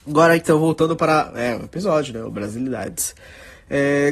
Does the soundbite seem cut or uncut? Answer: uncut